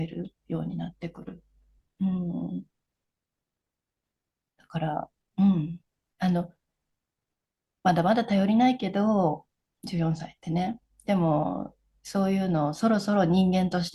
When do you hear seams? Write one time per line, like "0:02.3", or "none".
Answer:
none